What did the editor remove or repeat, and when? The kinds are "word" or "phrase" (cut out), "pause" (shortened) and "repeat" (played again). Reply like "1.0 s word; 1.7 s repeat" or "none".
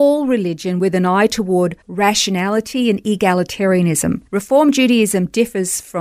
1.8 s pause; 4.3 s pause